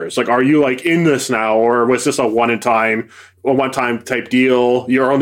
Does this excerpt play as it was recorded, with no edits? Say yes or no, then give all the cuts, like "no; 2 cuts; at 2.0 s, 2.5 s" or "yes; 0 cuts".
no; 1 cut; at 3.4 s